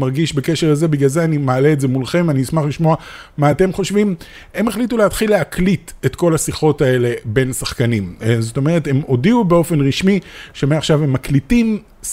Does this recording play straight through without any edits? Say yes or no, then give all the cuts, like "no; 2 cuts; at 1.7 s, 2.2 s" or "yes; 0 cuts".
yes; 0 cuts